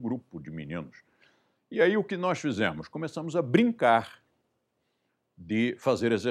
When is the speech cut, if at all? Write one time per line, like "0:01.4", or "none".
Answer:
none